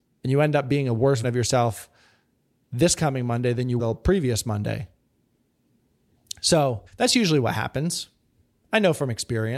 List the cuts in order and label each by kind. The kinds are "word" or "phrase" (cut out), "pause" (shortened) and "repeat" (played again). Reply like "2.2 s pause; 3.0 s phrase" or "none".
1.2 s word; 3.8 s word; 6.9 s pause